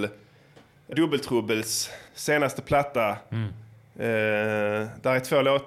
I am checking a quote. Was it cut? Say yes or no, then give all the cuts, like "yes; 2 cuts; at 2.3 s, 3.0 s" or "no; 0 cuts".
yes; 2 cuts; at 0.9 s, 2.1 s